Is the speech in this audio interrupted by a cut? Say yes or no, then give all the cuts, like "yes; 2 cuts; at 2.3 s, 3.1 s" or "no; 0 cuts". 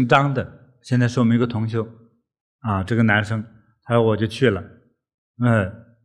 no; 0 cuts